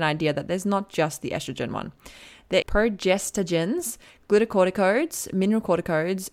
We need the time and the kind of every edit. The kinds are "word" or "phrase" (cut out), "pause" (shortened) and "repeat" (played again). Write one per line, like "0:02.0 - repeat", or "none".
0:02.6 - word